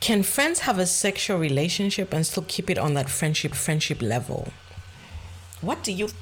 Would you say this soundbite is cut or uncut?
cut